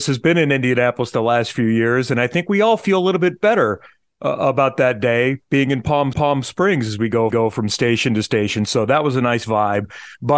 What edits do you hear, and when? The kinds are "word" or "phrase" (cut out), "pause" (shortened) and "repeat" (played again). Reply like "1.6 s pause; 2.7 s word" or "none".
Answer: 6.1 s repeat; 7.3 s repeat